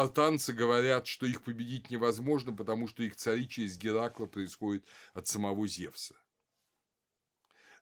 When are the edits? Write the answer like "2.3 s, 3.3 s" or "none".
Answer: none